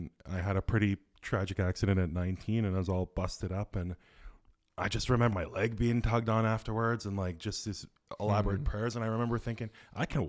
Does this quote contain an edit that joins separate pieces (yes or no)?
yes